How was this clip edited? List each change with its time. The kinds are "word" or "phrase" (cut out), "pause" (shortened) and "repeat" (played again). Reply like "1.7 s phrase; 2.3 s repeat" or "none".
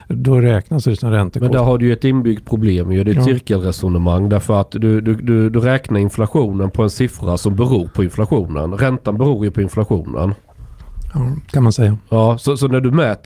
none